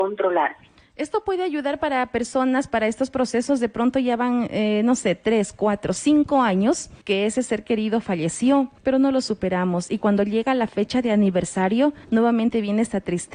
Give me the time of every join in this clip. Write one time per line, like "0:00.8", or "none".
0:07.0
0:08.8
0:12.0